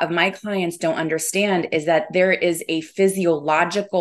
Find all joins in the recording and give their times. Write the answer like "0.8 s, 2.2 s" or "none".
none